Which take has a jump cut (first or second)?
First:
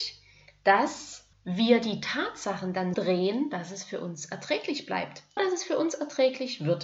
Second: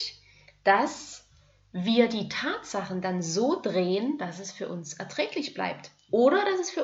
first